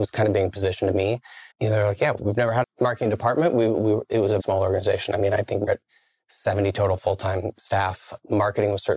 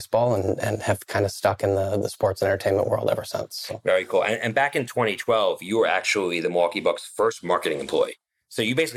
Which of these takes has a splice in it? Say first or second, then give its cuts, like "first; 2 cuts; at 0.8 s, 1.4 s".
first; 5 cuts; at 1.5 s, 2.2 s, 2.6 s, 4.4 s, 5.7 s